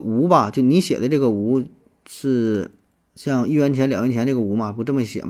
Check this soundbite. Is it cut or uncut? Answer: uncut